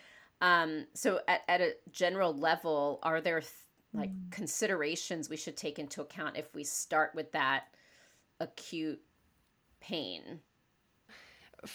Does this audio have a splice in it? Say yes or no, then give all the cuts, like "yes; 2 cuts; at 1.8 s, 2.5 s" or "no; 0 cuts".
no; 0 cuts